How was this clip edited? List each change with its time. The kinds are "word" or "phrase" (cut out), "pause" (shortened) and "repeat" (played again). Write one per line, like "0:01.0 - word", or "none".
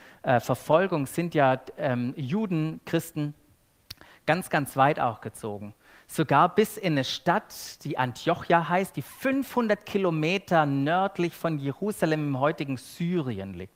none